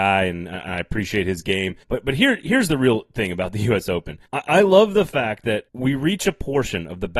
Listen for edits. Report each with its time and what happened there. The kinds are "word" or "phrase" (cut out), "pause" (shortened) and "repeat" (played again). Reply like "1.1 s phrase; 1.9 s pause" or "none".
1.8 s pause; 4.3 s pause; 5.7 s pause